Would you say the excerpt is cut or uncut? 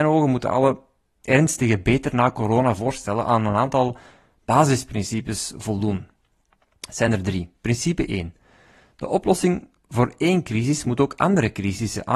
uncut